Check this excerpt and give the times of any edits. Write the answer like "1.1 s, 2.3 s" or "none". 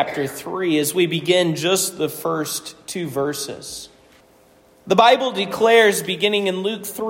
4.2 s